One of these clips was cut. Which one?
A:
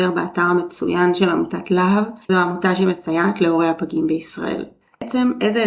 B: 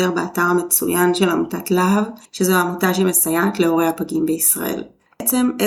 A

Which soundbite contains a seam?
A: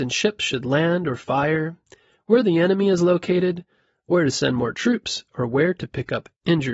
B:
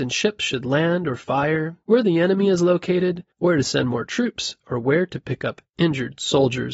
B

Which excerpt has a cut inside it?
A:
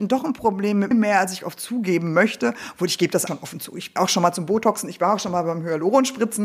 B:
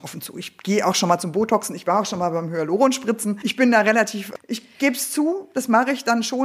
A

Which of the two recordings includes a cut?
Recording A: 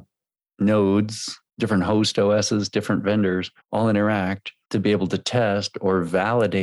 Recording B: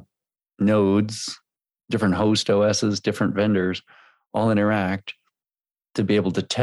A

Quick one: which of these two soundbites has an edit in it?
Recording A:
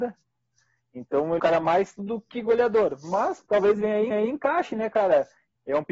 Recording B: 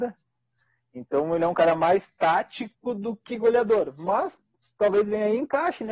A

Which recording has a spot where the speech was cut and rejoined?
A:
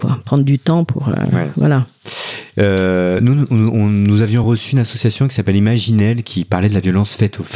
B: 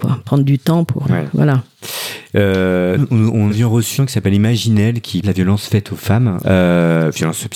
B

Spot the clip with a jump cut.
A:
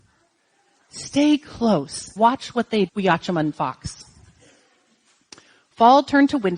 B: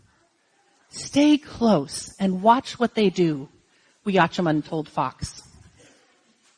A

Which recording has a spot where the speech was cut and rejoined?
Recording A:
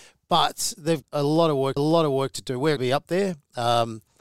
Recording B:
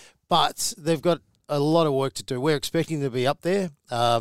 A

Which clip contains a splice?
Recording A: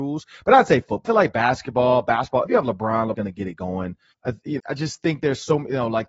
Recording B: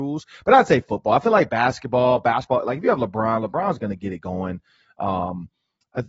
A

